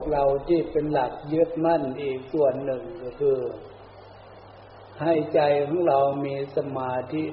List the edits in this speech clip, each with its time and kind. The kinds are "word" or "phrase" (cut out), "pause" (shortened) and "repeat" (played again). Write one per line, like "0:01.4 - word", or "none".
0:04.9 - pause